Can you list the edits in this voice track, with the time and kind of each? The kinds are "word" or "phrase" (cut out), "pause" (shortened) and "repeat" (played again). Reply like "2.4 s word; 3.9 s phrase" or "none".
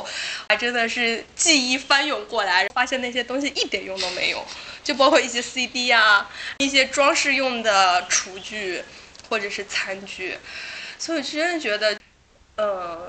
none